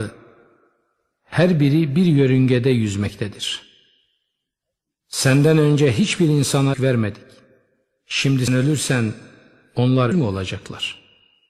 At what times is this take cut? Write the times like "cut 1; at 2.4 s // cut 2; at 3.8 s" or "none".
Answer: cut 1; at 6.7 s // cut 2; at 8.5 s // cut 3; at 10.1 s